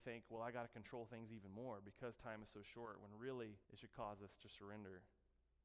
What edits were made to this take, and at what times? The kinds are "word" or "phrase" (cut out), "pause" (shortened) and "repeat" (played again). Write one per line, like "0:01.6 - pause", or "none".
0:03.6 - pause

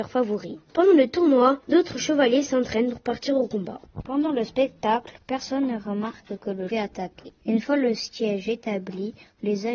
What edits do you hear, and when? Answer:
0:01.6 - pause
0:06.7 - phrase

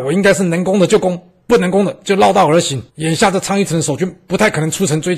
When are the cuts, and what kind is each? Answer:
0:02.9 - pause

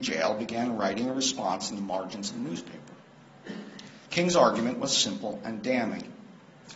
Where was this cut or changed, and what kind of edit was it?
0:04.1 - pause

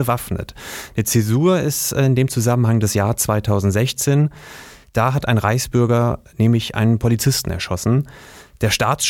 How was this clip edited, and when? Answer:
none

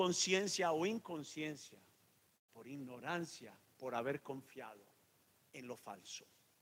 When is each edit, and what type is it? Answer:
none

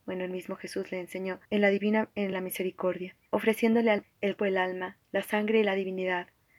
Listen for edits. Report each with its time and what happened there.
0:01.4 - pause
0:02.3 - phrase
0:03.3 - pause
0:04.0 - word
0:04.4 - word
0:05.0 - pause

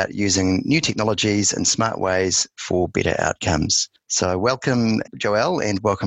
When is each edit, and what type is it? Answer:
0:05.0 - word

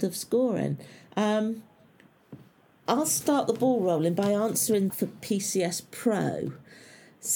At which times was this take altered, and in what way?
0:02.9 - word
0:04.9 - word

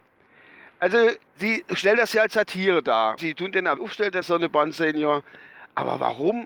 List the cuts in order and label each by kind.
0:01.3 - pause
0:03.2 - word
0:03.8 - word
0:04.2 - word

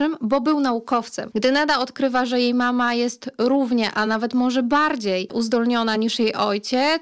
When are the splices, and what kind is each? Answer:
none

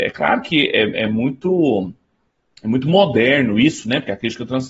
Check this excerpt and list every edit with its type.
none

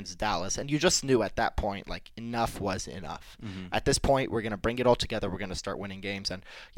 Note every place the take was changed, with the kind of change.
none

